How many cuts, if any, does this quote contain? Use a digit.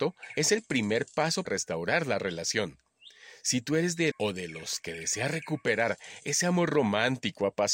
2